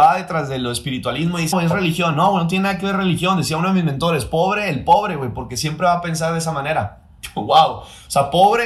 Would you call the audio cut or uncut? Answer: cut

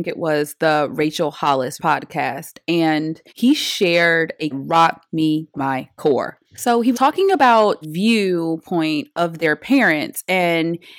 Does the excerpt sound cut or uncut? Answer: cut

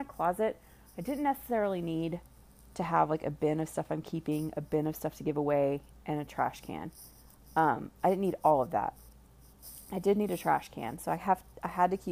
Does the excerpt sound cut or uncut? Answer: uncut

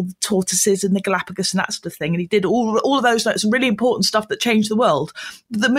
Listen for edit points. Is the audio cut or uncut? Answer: uncut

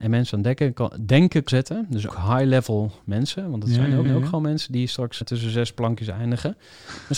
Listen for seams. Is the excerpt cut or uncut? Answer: cut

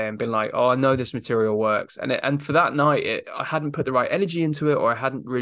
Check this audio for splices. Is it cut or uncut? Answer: uncut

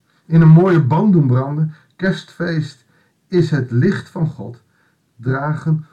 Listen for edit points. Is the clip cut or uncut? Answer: uncut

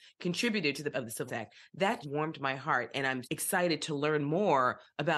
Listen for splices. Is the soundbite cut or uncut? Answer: cut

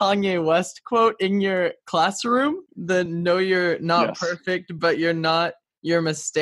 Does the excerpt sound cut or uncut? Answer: uncut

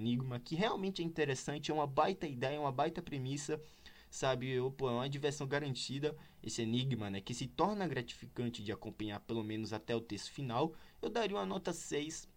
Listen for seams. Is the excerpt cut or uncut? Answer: uncut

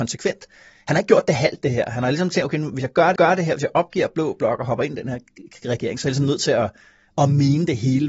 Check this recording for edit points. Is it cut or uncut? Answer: cut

